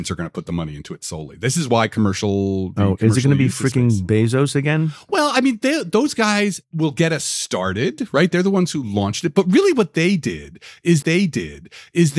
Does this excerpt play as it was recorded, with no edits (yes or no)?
no